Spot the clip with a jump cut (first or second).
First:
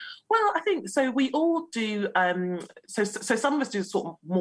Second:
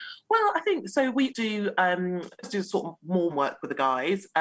second